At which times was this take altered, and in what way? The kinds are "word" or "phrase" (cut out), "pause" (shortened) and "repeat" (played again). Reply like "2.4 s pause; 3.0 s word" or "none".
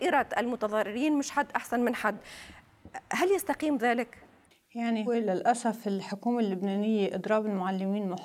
5.1 s word